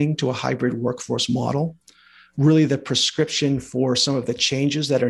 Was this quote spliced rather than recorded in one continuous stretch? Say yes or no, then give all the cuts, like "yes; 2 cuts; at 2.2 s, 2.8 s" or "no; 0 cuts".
no; 0 cuts